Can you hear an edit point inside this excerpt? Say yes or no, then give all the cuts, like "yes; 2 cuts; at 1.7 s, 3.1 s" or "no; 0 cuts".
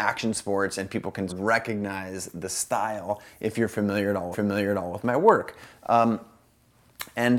yes; 2 cuts; at 1.3 s, 4.3 s